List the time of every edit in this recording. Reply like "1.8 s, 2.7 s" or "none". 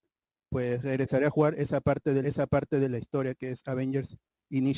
2.2 s

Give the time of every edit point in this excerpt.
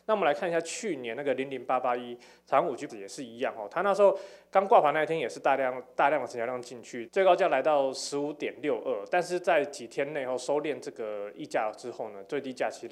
2.9 s

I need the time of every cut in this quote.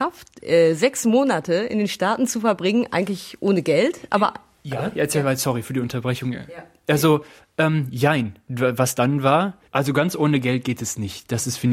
9.7 s

